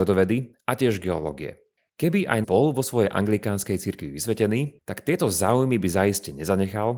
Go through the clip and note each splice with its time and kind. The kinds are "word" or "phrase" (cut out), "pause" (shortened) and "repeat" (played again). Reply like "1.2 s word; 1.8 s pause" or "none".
2.4 s word